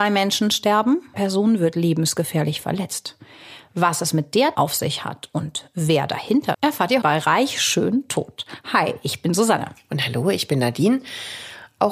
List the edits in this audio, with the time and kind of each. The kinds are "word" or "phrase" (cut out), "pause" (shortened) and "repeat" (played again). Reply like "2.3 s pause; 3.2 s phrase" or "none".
1.1 s word; 4.5 s word; 6.5 s word; 7.0 s word